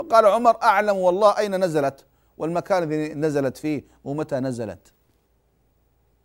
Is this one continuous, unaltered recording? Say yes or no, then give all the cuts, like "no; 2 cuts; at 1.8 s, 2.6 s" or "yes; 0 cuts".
yes; 0 cuts